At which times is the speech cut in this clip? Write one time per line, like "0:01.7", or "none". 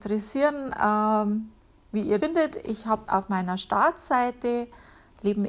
0:01.6
0:02.2
0:03.1

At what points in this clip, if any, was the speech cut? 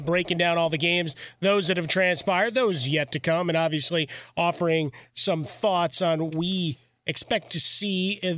0:06.3

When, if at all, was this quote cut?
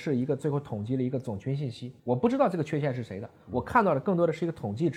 0:02.0

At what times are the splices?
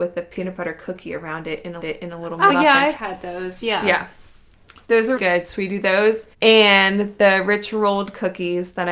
0:01.8
0:02.5
0:03.0
0:05.2
0:06.3

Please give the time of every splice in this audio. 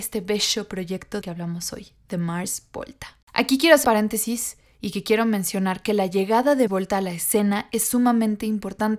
0:01.2
0:03.2
0:03.8
0:06.7

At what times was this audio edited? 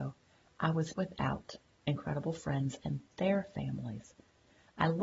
0:00.9

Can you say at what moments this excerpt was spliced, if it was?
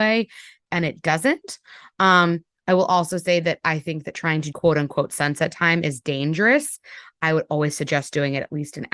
0:04.5

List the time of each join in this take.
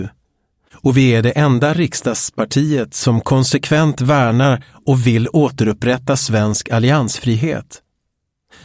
none

